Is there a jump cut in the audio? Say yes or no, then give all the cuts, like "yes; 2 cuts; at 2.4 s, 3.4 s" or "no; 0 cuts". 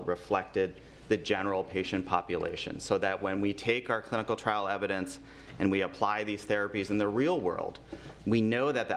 no; 0 cuts